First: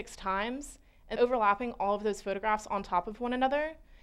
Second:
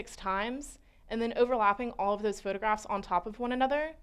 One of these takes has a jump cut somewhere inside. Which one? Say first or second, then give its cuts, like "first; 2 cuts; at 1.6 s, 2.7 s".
first; 1 cut; at 1.2 s